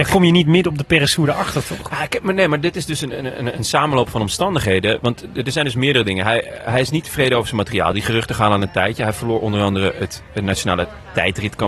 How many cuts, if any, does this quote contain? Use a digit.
0